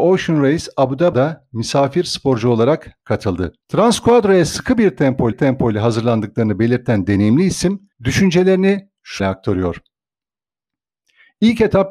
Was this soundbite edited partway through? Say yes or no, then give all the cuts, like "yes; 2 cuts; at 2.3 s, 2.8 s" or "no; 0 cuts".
yes; 5 cuts; at 1.1 s, 3.6 s, 5.3 s, 7.9 s, 9.2 s